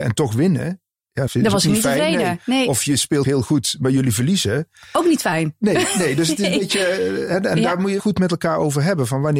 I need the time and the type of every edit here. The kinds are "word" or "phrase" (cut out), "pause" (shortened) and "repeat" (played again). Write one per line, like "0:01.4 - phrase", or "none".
0:01.3 - word
0:03.2 - word
0:08.0 - word